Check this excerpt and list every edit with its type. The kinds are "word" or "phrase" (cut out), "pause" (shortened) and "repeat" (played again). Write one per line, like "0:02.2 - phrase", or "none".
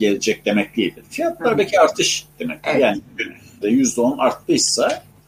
0:02.3 - word
0:03.6 - phrase